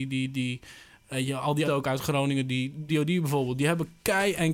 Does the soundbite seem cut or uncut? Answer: cut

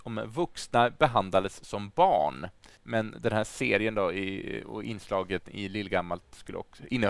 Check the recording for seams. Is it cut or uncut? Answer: cut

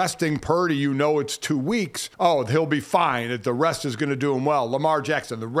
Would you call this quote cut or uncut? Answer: cut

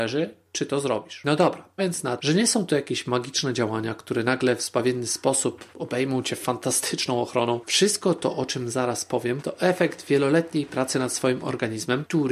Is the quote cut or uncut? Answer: cut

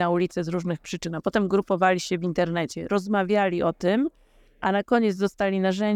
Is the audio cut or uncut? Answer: uncut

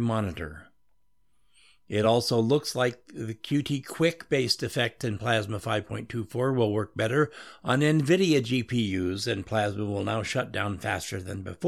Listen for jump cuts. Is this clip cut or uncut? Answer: uncut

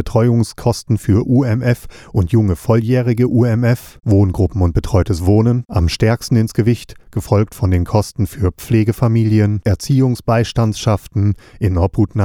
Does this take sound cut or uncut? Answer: uncut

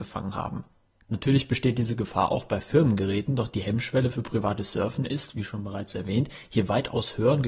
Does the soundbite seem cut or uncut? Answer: uncut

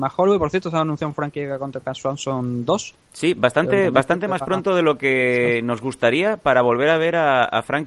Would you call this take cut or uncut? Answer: uncut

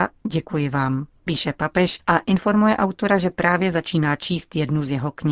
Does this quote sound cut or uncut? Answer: cut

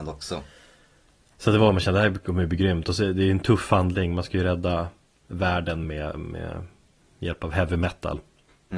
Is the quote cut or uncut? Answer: uncut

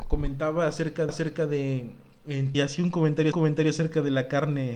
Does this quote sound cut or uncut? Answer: cut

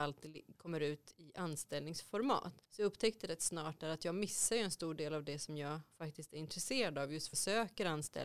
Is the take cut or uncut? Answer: cut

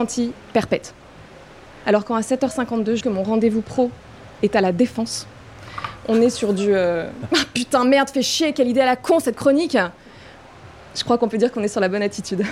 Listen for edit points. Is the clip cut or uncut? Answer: cut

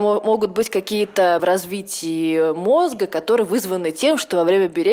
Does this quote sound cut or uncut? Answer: cut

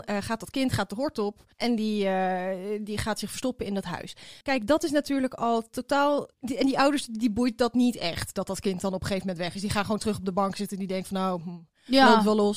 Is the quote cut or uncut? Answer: cut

